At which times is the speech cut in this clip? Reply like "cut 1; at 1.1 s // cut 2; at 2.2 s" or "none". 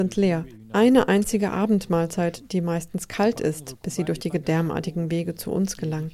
none